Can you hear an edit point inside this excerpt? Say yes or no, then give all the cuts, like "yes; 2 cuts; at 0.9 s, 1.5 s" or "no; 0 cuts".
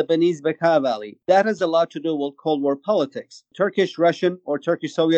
no; 0 cuts